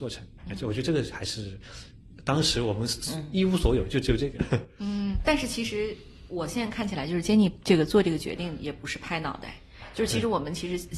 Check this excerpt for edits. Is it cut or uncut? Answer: uncut